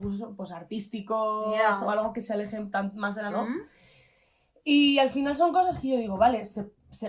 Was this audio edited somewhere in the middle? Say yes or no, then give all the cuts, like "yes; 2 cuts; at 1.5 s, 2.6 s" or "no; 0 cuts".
yes; 1 cut; at 3.3 s